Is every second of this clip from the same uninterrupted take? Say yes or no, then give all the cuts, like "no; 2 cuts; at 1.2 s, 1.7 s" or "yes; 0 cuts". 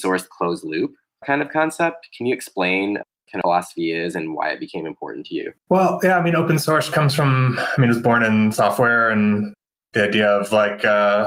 no; 3 cuts; at 1.2 s, 3.4 s, 5.6 s